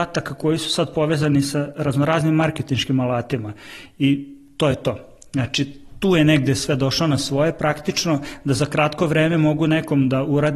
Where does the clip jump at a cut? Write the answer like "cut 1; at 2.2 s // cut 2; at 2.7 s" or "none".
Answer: none